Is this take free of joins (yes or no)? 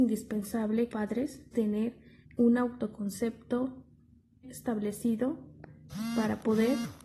no